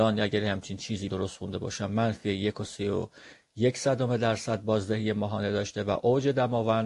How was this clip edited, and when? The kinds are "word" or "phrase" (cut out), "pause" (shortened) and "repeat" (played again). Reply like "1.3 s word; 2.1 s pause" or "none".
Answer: 1.1 s word